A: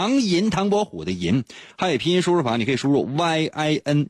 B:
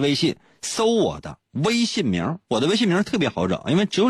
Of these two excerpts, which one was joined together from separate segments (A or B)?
B